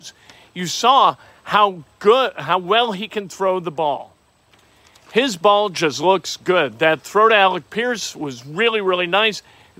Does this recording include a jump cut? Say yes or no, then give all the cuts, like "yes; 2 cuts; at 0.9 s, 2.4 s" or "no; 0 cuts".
no; 0 cuts